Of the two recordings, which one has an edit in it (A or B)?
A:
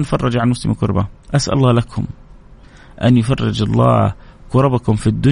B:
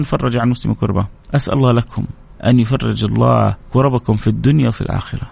B